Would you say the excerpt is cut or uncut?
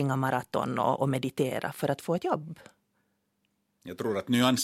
uncut